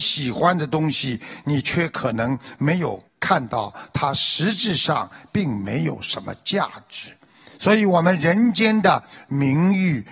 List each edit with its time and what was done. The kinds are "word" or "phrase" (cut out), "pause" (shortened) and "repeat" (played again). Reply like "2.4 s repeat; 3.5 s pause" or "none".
3.1 s pause

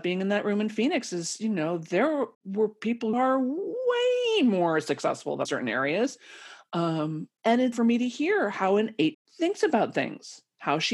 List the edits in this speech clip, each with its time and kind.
2.3 s pause; 3.1 s word; 5.5 s phrase; 7.4 s pause; 7.7 s phrase; 9.1 s phrase

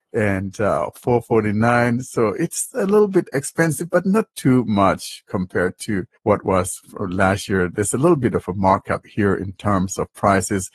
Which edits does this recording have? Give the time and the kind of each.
6.2 s pause

